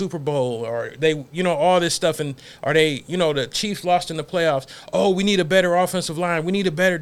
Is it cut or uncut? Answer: uncut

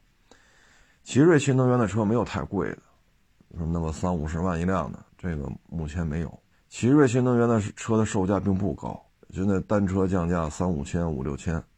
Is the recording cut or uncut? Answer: cut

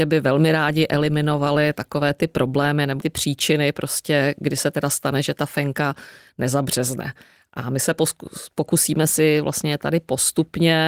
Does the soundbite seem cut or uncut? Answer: cut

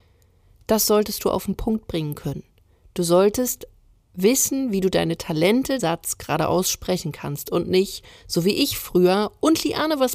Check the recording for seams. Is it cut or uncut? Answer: cut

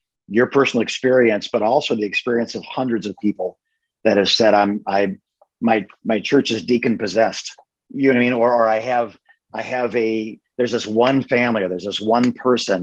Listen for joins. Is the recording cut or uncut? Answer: uncut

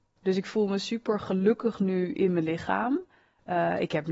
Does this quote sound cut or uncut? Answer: uncut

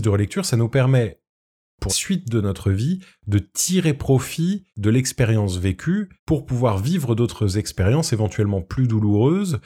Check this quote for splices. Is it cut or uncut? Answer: cut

